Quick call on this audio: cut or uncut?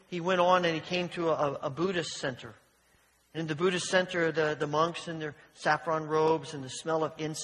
uncut